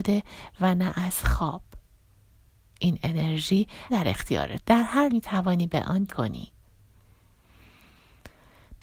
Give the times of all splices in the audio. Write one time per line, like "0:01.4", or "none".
0:03.9
0:04.6
0:05.1
0:06.1